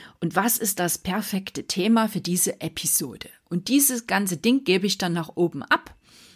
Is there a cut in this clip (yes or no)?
no